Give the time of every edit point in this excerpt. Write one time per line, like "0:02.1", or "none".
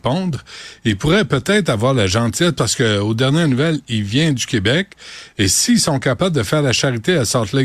none